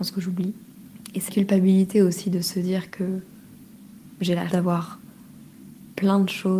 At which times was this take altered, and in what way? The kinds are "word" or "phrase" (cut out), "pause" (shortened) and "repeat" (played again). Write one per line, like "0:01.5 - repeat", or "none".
0:01.3 - word
0:04.5 - word